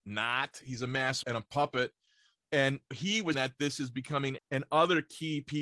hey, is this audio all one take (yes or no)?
no